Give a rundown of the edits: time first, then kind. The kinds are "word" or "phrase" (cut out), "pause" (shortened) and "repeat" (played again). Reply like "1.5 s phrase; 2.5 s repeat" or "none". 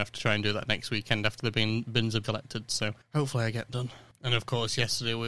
2.2 s word; 3.0 s pause; 3.7 s word